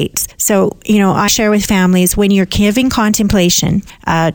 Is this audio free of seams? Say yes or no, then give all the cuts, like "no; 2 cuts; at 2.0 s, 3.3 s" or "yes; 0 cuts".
no; 1 cut; at 1.3 s